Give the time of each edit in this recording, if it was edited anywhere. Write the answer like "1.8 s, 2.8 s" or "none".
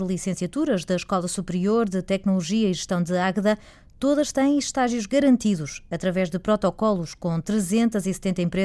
none